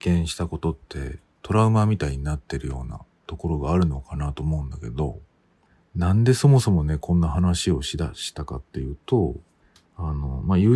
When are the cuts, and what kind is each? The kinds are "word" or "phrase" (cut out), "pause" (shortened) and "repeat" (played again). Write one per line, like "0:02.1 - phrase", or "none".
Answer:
none